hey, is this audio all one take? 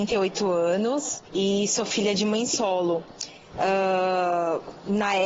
no; 1 cut; at 1.3 s

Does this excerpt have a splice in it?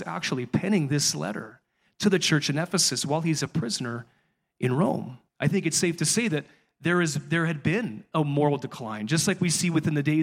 yes; 1 cut; at 5.3 s

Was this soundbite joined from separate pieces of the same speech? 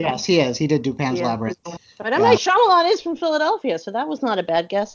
no; 0 cuts

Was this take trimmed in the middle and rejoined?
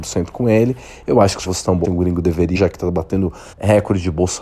yes; 4 cuts; at 1.5 s, 1.8 s, 2.6 s, 3.5 s

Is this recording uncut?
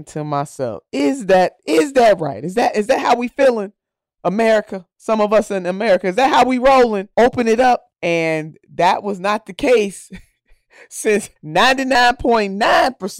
no; 3 cuts; at 7.1 s, 7.9 s, 11.4 s

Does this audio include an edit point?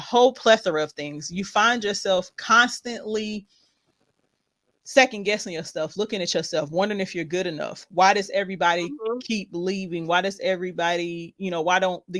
no; 0 cuts

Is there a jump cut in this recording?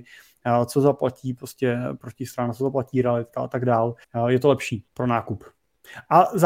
yes; 2 cuts; at 4.0 s, 4.9 s

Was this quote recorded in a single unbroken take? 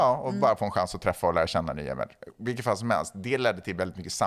yes; 0 cuts

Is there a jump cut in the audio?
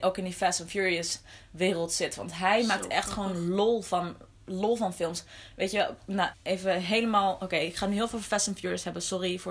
yes; 1 cut; at 6.3 s

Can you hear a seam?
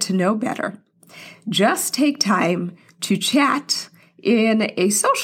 no; 0 cuts

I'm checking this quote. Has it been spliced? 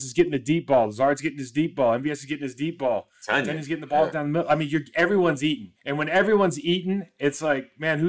yes; 1 cut; at 5.7 s

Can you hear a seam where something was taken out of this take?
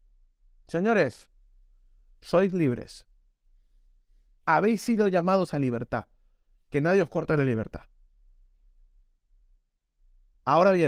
no; 0 cuts

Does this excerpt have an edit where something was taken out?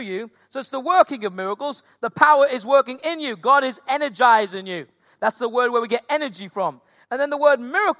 no; 0 cuts

